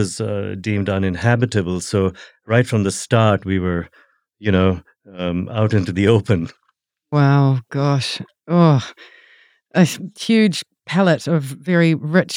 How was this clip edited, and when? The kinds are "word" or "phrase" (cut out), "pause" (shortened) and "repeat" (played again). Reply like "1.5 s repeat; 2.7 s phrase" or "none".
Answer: none